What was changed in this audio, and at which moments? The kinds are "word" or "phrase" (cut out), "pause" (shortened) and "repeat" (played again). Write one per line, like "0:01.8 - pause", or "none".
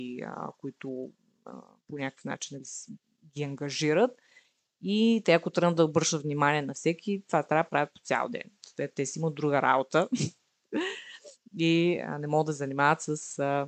none